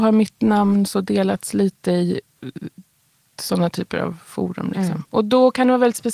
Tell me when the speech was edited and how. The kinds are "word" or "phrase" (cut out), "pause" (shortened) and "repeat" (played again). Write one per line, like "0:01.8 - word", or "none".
none